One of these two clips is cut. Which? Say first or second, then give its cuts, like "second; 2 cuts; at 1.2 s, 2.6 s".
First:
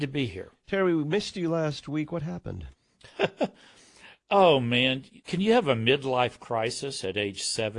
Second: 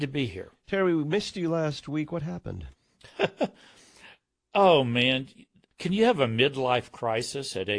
first; 2 cuts; at 4.2 s, 5.2 s